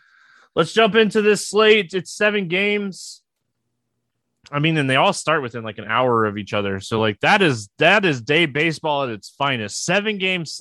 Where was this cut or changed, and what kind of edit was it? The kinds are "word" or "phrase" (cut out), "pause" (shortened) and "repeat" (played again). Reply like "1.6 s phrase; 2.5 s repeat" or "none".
none